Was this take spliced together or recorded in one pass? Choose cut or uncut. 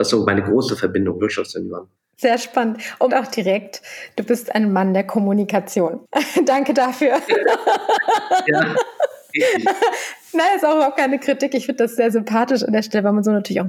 cut